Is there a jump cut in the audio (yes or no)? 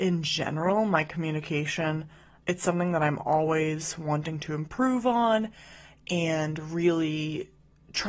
no